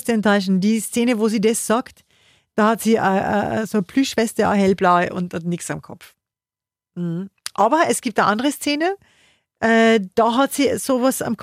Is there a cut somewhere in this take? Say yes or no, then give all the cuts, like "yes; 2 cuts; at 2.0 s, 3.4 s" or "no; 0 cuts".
no; 0 cuts